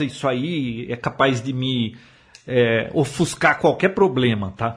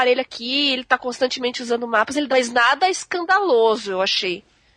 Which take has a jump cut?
second; 1 cut; at 2.3 s

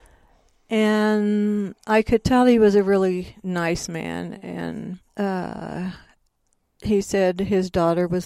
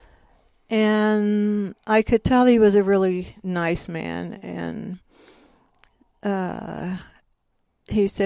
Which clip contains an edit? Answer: first; 1 cut; at 5.1 s

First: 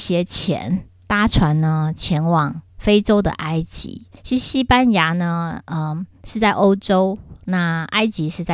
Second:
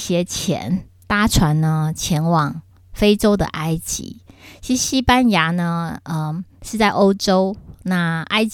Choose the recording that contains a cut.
first; 2 cuts; at 2.7 s, 4.2 s

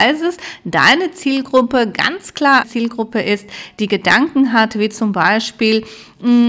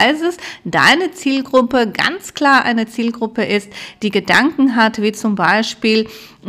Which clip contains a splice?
first; 1 cut; at 2.6 s

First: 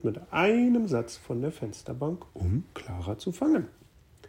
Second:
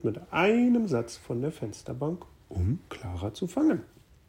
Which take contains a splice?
first; 1 cut; at 2.3 s

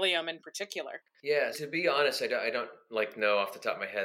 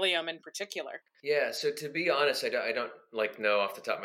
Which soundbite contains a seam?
first; 1 cut; at 1.5 s

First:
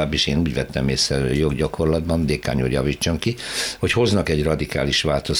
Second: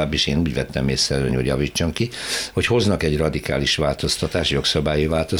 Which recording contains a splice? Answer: second; 1 cut; at 1.3 s

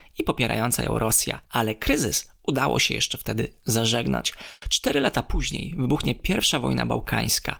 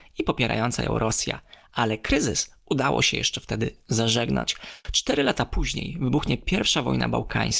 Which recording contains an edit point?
first; 1 cut; at 1.4 s

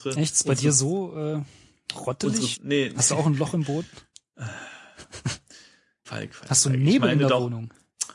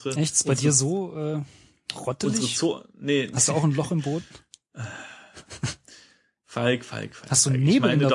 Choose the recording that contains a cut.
first; 2 cuts; at 2.5 s, 6.0 s

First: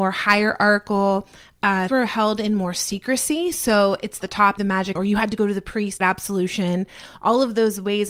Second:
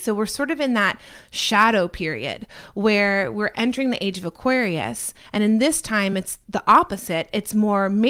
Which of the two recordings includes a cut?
first; 5 cuts; at 1.9 s, 4.2 s, 4.6 s, 5.0 s, 6.0 s

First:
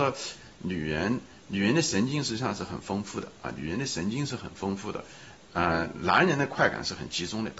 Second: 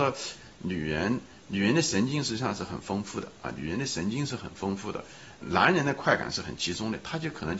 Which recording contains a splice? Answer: second; 1 cut; at 5.4 s

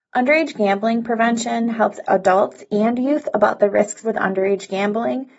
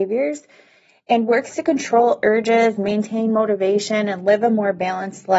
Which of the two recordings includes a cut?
first; 2 cuts; at 2.0 s, 4.0 s

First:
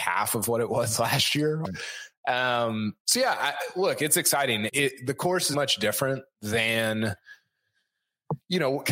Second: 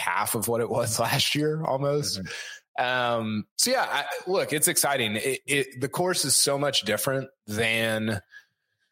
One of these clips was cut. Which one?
first; 3 cuts; at 1.6 s, 4.7 s, 5.5 s

